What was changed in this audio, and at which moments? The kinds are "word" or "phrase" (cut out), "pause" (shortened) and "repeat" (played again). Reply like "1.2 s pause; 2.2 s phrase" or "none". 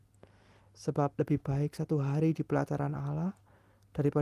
1.1 s pause